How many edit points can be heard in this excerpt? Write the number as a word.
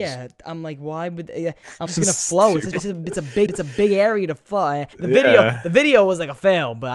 four